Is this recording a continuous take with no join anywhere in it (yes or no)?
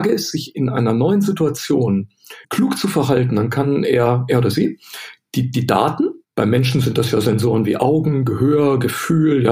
no